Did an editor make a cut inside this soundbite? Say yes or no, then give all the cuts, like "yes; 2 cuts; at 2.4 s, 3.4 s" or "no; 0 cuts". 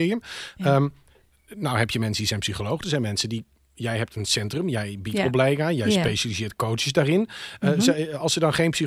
no; 0 cuts